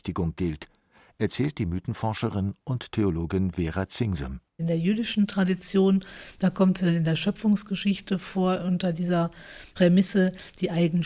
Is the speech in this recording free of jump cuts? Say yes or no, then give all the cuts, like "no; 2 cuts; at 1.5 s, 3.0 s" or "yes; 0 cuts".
no; 1 cut; at 4.5 s